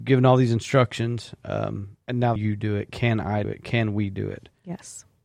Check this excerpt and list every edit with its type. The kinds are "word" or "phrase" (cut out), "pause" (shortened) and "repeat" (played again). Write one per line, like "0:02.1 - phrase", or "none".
0:02.0 - pause
0:02.4 - phrase
0:03.4 - word